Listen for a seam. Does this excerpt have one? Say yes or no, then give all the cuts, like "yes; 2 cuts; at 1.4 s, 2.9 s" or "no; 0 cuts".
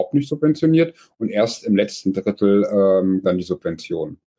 yes; 1 cut; at 3.2 s